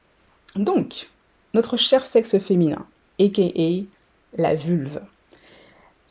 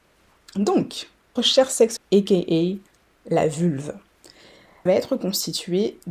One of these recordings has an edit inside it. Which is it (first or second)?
second